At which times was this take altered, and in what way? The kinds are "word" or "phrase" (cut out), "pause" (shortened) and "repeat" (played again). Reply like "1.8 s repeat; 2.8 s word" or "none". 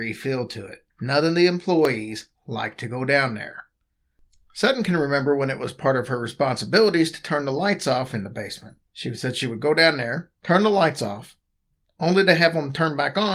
0.9 s pause; 8.9 s pause; 10.4 s pause